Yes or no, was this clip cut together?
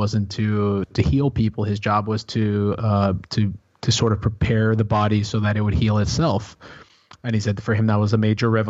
no